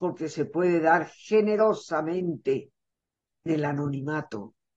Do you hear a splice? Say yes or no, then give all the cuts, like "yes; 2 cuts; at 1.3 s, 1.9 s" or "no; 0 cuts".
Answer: yes; 1 cut; at 3.5 s